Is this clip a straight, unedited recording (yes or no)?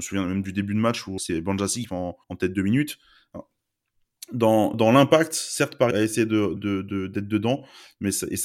no